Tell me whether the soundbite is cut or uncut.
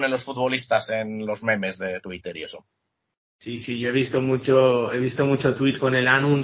uncut